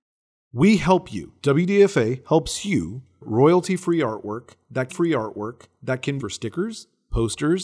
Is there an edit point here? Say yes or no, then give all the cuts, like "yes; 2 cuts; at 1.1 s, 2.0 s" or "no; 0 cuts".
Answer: yes; 3 cuts; at 3.2 s, 4.9 s, 6.2 s